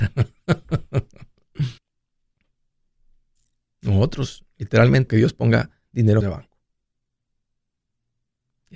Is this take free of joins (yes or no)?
no